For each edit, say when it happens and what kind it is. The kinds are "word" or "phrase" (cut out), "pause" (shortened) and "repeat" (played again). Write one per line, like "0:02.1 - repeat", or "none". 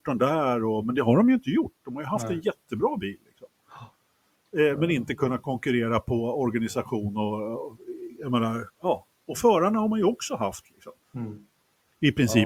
0:08.7 - pause
0:11.0 - pause

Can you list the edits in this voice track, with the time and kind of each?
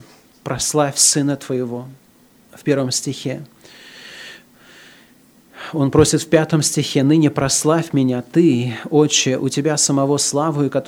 none

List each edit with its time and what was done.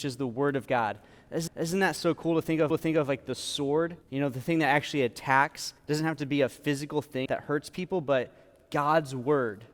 0:01.5 - repeat
0:02.7 - repeat
0:04.0 - pause
0:05.8 - pause
0:07.3 - word

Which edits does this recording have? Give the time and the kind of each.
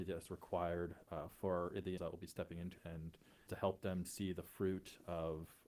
0:02.0 - word
0:02.8 - word
0:03.5 - word
0:04.0 - word

